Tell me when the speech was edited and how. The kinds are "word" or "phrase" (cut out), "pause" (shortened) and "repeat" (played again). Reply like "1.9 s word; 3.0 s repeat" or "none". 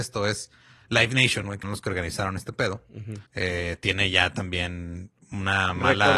1.6 s word; 3.3 s pause